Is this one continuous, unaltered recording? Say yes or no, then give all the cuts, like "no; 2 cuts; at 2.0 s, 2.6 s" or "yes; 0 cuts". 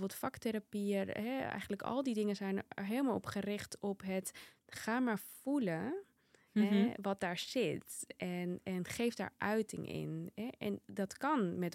yes; 0 cuts